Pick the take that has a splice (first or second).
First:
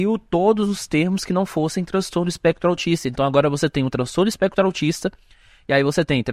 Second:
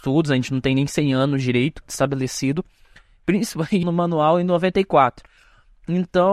second